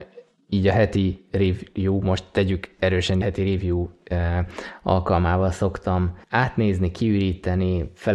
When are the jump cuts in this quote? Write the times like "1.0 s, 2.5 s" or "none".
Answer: 3.2 s, 6.2 s

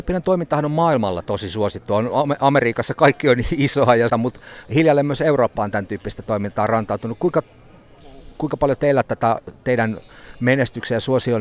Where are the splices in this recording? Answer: 4.1 s

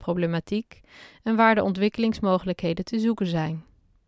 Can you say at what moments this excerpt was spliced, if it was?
none

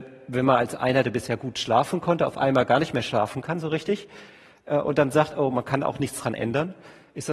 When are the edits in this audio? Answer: none

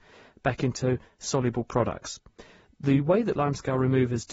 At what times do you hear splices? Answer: 3.3 s

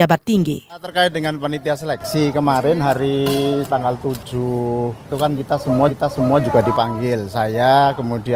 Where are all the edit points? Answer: 3.6 s, 5.9 s

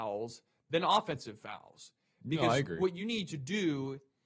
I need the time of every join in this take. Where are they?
none

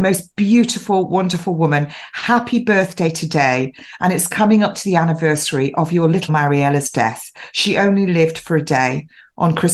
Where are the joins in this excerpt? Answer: 6.3 s

